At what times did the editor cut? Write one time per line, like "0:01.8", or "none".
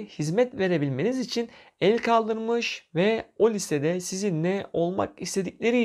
none